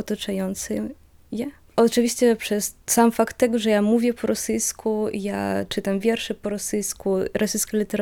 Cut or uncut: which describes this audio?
cut